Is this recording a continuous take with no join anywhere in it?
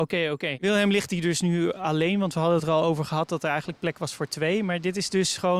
yes; 0 cuts

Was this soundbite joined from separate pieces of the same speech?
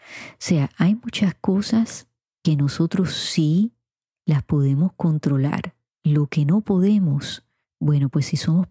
no; 0 cuts

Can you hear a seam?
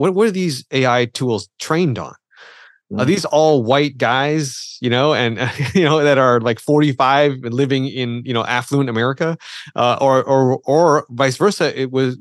no; 0 cuts

